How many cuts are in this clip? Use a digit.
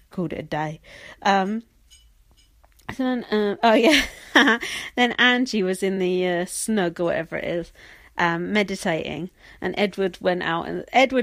0